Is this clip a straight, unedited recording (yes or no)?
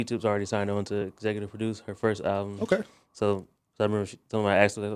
yes